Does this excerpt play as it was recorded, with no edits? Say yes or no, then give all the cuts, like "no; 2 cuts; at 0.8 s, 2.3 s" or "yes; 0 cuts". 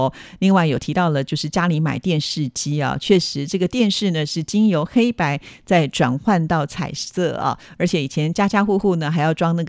yes; 0 cuts